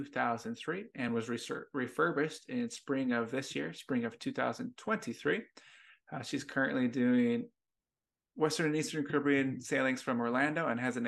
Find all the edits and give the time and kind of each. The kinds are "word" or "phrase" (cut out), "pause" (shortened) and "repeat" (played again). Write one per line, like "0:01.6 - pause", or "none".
none